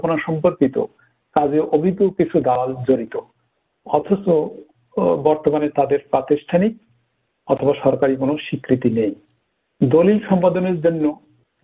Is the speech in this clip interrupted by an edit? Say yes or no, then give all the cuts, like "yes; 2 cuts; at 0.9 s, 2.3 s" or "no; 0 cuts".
no; 0 cuts